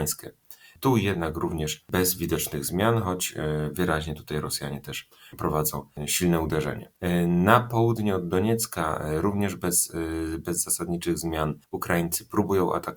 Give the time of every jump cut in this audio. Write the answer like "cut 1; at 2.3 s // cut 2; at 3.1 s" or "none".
none